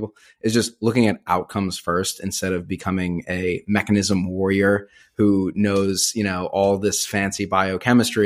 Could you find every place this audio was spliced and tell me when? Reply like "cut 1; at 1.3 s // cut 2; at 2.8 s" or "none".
none